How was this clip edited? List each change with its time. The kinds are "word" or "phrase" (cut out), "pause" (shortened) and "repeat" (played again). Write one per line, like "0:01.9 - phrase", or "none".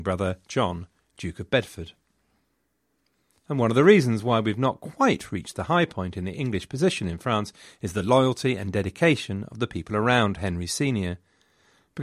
none